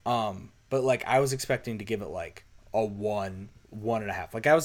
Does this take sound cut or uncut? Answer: uncut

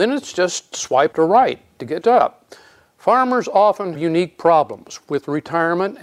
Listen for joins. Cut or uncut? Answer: cut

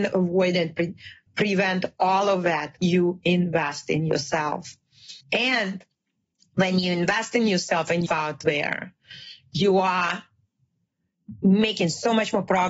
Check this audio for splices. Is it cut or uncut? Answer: cut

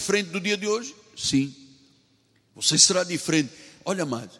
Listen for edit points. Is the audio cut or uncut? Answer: uncut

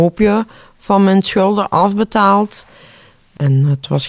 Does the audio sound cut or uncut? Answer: uncut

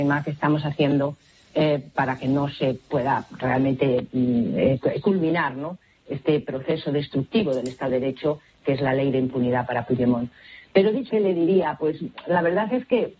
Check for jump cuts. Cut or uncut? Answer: cut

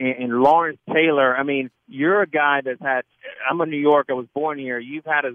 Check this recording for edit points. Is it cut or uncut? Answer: cut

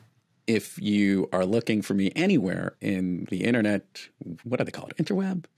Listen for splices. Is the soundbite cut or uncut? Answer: uncut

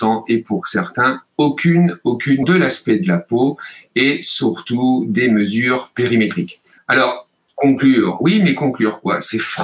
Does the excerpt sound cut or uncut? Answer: cut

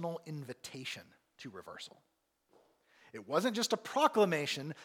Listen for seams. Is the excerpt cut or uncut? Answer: uncut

